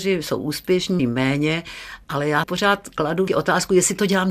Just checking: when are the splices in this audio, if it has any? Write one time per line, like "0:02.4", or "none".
0:01.0
0:02.4
0:03.3